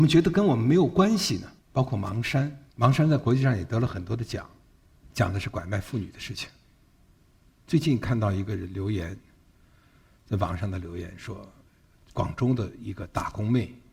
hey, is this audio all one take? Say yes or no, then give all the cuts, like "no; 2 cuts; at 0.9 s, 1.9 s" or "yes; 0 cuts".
no; 3 cuts; at 1.6 s, 2.7 s, 5.1 s